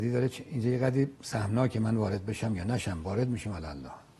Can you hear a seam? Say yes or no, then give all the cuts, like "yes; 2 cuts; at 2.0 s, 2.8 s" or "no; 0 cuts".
yes; 1 cut; at 1.1 s